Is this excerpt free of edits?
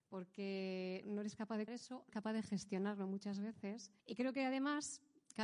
no; 4 cuts; at 1.0 s, 1.7 s, 2.1 s, 4.0 s

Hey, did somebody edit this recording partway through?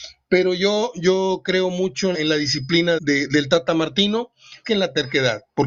yes; 3 cuts; at 2.1 s, 3.0 s, 4.6 s

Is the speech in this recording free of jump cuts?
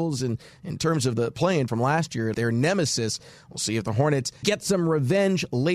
no; 3 cuts; at 1.7 s, 2.3 s, 4.4 s

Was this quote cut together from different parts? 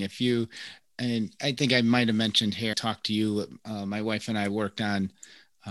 yes; 1 cut; at 2.7 s

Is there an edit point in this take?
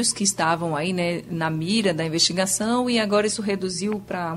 no; 0 cuts

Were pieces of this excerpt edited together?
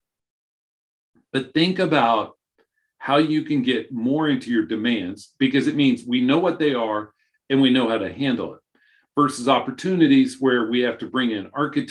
no; 0 cuts

